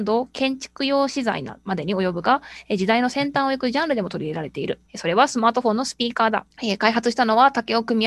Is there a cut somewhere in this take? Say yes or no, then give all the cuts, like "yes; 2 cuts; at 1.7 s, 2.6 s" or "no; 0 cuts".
yes; 2 cuts; at 4.9 s, 6.5 s